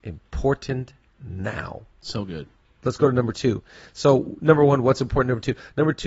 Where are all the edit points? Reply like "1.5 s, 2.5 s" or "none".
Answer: none